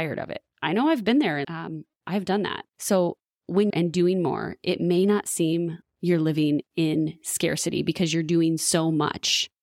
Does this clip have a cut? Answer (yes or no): yes